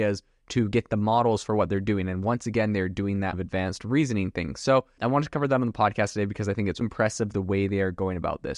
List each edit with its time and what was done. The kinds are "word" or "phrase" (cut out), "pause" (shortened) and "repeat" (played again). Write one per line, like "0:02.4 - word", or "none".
0:03.3 - phrase
0:05.0 - word
0:06.8 - word